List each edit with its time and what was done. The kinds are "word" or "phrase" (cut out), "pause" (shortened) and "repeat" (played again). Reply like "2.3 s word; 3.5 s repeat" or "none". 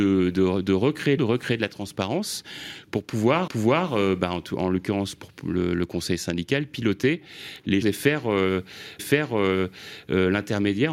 1.2 s phrase; 3.5 s repeat; 7.8 s word; 9.0 s repeat

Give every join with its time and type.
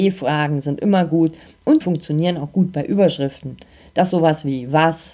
1.8 s word; 4.1 s word

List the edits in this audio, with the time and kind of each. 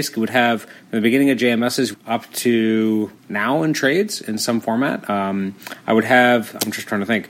1.9 s word; 3.2 s pause

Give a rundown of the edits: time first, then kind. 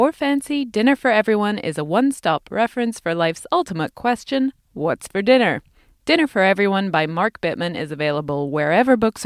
none

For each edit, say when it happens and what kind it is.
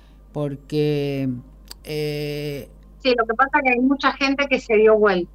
1.8 s pause

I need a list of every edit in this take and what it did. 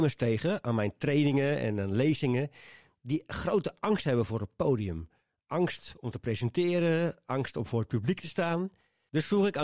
none

